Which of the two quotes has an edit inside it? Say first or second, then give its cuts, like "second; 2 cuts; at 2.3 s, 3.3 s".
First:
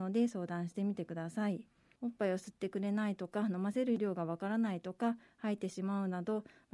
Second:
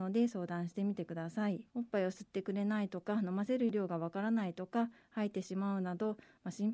second; 1 cut; at 1.7 s